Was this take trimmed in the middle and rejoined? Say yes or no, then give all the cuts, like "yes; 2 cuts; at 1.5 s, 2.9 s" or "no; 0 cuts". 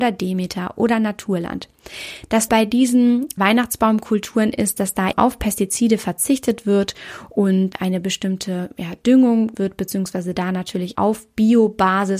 yes; 6 cuts; at 2.5 s, 3.4 s, 5.1 s, 7.7 s, 9.5 s, 10.9 s